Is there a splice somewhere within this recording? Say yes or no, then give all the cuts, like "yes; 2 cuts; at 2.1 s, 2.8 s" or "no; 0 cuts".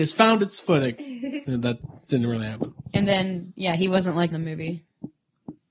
yes; 1 cut; at 4.3 s